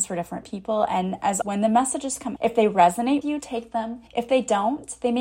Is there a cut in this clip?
yes; 4 cuts; at 1.4 s, 2.4 s, 3.2 s, 4.1 s

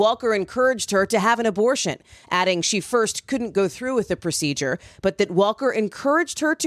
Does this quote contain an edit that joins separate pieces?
no; 0 cuts

